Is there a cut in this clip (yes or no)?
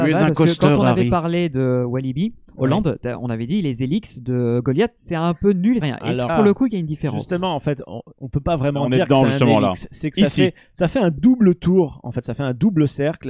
yes